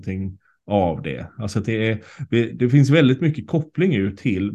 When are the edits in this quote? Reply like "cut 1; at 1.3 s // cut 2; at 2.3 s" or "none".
none